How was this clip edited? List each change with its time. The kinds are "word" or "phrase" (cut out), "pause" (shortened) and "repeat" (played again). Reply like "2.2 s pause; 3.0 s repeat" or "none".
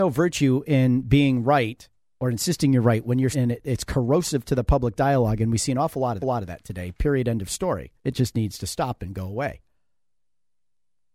2.0 s pause; 3.3 s phrase; 6.2 s repeat; 8.0 s pause